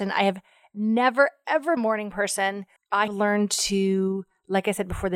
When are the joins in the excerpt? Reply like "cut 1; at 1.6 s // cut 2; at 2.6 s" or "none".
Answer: cut 1; at 1.8 s // cut 2; at 2.8 s // cut 3; at 3.1 s